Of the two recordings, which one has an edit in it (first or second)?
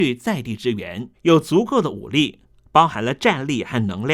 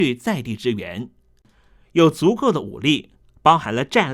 first